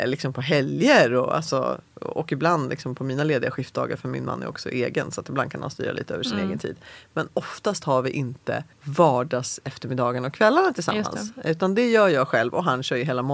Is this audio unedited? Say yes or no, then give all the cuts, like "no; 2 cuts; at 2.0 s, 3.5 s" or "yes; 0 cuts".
no; 1 cut; at 8.7 s